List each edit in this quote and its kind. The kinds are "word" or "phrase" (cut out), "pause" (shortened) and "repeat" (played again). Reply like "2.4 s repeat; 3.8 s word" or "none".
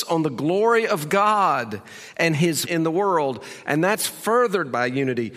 2.7 s word